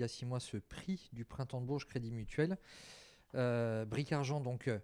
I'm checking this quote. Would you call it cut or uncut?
uncut